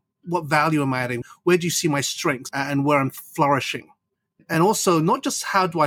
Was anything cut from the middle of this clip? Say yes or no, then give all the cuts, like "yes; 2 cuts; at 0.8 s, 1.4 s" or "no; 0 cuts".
no; 0 cuts